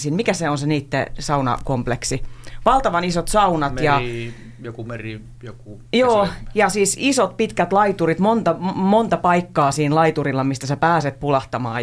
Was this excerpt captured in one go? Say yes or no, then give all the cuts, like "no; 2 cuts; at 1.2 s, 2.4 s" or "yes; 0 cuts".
yes; 0 cuts